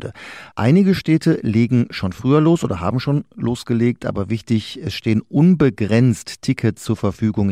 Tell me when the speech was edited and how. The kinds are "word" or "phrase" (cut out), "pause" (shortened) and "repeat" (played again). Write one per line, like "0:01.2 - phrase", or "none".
none